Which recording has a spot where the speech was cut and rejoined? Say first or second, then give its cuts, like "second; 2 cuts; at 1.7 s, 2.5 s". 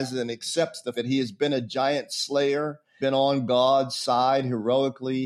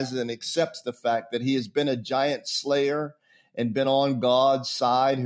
first; 2 cuts; at 0.9 s, 3.0 s